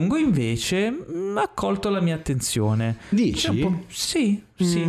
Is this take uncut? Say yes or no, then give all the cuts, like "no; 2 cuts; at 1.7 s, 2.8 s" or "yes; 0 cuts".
yes; 0 cuts